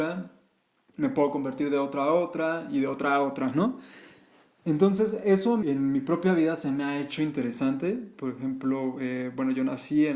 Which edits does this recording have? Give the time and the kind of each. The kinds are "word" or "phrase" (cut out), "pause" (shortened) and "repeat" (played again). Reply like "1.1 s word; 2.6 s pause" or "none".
5.6 s word